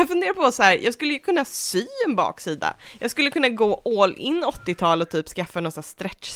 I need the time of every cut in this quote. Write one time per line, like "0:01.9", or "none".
none